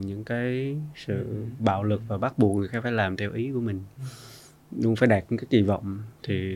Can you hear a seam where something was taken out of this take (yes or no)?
no